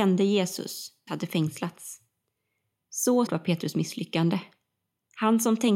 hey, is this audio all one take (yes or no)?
no